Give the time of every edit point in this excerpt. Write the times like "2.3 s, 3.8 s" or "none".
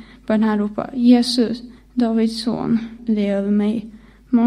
1.8 s, 3.0 s